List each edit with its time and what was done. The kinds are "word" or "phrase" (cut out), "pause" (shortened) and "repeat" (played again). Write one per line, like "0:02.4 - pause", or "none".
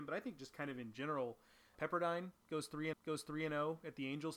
0:01.8 - word
0:02.9 - repeat